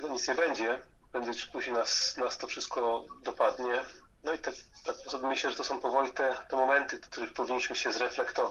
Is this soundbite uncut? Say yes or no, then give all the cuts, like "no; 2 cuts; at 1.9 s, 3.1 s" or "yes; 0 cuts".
yes; 0 cuts